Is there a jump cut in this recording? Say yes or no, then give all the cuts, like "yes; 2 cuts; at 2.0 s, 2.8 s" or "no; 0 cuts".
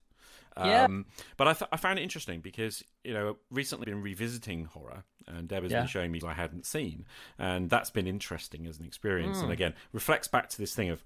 yes; 3 cuts; at 3.8 s, 6.2 s, 7.7 s